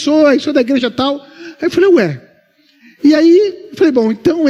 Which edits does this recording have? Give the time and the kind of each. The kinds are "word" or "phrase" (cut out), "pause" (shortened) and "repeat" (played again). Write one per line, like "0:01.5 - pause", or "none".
none